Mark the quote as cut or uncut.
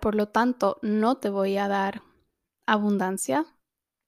uncut